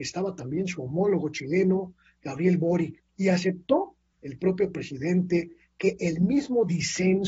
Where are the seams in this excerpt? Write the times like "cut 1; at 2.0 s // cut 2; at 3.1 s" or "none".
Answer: cut 1; at 3.1 s

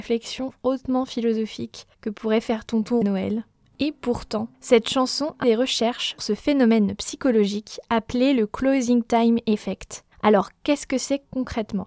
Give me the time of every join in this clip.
cut 1; at 1.9 s // cut 2; at 3.0 s // cut 3; at 4.5 s // cut 4; at 5.4 s // cut 5; at 6.2 s // cut 6; at 10.1 s

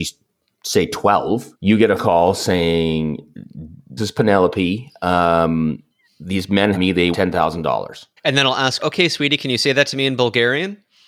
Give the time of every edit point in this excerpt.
cut 1; at 1.5 s // cut 2; at 2.0 s // cut 3; at 4.0 s // cut 4; at 5.9 s // cut 5; at 6.7 s // cut 6; at 7.1 s // cut 7; at 8.2 s // cut 8; at 8.8 s

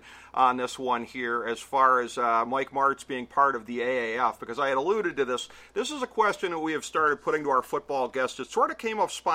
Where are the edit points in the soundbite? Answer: none

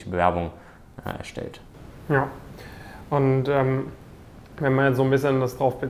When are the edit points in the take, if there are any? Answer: none

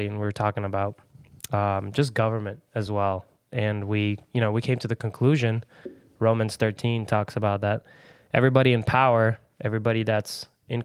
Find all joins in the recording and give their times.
none

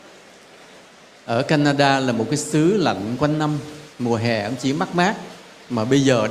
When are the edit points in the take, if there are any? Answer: cut 1; at 3.9 s

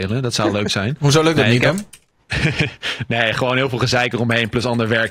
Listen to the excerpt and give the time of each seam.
none

